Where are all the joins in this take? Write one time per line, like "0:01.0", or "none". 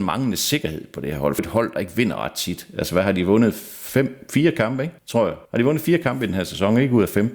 0:01.4
0:05.0
0:05.4